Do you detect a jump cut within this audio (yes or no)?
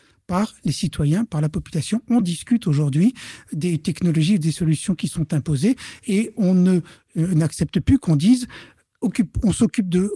no